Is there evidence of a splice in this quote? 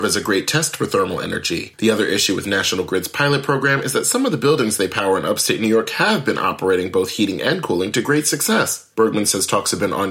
no; 0 cuts

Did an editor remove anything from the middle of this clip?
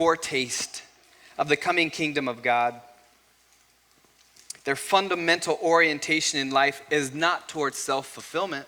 yes; 1 cut; at 4.6 s

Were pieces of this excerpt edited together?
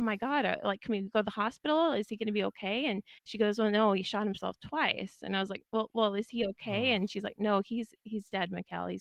yes; 1 cut; at 3.2 s

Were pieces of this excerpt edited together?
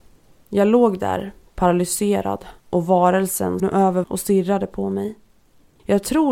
yes; 3 cuts; at 2.6 s, 3.6 s, 4.0 s

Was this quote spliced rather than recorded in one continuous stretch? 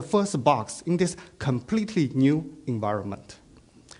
no; 0 cuts

